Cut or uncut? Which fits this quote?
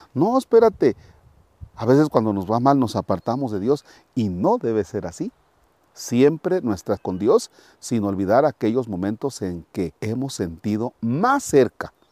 cut